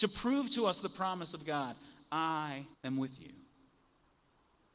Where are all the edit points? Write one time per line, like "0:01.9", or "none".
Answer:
0:02.7